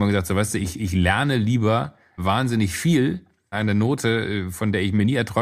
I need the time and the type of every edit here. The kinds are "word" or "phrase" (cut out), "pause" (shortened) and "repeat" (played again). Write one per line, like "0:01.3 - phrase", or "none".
0:02.2 - word
0:03.5 - phrase